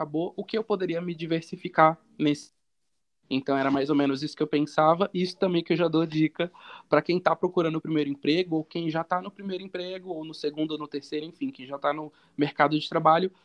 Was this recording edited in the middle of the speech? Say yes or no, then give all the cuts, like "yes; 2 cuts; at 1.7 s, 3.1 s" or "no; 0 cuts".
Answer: no; 0 cuts